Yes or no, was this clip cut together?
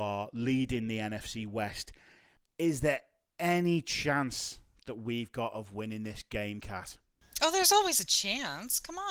no